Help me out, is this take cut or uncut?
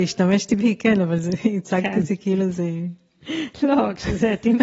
uncut